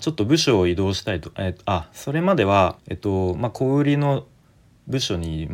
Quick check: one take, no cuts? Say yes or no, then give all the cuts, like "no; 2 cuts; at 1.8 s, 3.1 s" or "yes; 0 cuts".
no; 1 cut; at 2.8 s